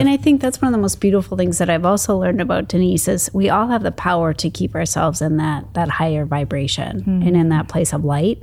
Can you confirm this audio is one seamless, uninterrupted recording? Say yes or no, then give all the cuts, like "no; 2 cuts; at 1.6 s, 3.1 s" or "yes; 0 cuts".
yes; 0 cuts